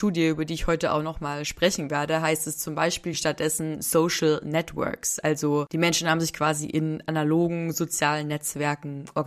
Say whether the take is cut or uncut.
uncut